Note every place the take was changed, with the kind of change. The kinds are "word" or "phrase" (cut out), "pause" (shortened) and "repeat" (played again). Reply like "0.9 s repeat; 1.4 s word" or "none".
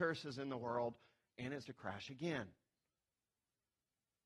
1.6 s word

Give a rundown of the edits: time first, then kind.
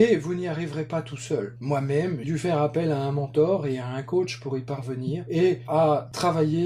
2.2 s word; 5.7 s word

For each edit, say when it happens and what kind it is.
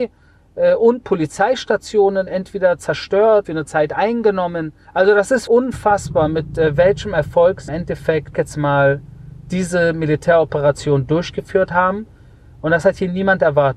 2.3 s word; 3.4 s phrase; 4.8 s pause; 5.5 s word; 7.7 s word; 8.3 s phrase

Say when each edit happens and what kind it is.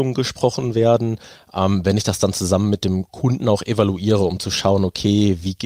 3.1 s pause

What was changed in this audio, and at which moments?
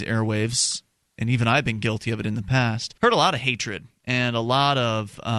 3.0 s pause

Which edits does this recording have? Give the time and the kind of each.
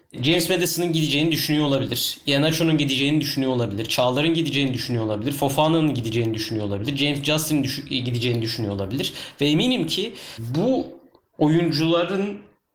none

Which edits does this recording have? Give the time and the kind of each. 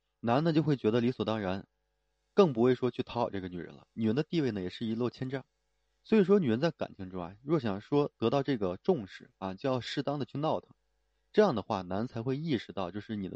none

